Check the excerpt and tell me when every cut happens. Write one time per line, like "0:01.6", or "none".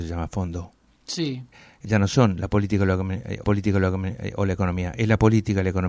0:01.8
0:03.4